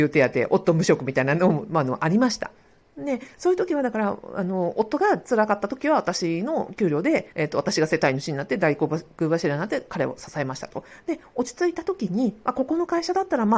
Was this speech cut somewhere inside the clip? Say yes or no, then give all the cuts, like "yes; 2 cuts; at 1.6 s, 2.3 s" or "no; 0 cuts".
yes; 1 cut; at 7.3 s